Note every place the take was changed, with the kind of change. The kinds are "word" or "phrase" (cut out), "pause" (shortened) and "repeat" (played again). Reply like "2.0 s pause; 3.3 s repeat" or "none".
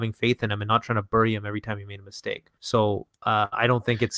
2.6 s pause